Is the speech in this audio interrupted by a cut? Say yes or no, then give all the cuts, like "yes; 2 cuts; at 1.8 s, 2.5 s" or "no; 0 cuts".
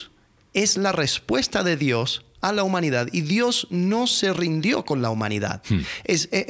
no; 0 cuts